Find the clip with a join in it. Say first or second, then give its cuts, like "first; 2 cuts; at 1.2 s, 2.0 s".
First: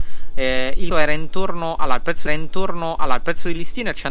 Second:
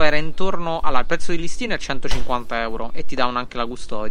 first; 2 cuts; at 0.9 s, 2.3 s